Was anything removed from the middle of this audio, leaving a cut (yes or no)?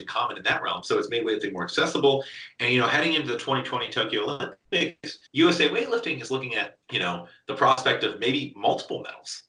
yes